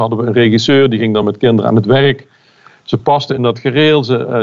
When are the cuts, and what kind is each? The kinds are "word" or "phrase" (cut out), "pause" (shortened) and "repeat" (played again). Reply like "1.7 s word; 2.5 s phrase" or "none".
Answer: none